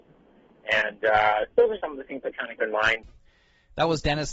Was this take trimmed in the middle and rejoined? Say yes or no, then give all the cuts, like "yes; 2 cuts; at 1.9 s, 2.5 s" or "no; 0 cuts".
yes; 2 cuts; at 1.8 s, 2.6 s